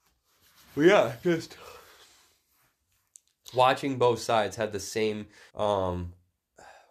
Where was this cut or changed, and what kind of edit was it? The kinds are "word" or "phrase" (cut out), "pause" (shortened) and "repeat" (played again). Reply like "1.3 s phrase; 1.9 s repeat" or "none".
1.2 s word; 5.5 s pause